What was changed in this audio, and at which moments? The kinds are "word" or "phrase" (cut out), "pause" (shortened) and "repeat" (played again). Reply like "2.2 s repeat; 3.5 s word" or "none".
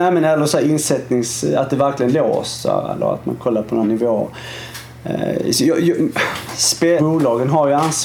2.1 s word; 3.8 s word; 7.0 s word